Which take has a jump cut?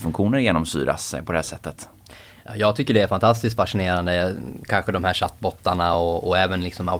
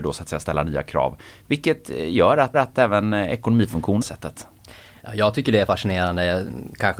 second; 3 cuts; at 2.5 s, 4.0 s, 5.7 s

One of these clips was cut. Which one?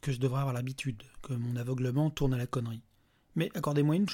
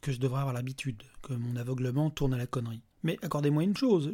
second; 1 cut; at 2.9 s

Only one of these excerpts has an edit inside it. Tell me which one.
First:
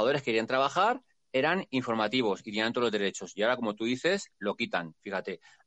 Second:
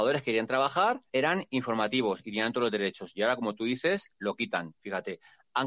second; 1 cut; at 1.1 s

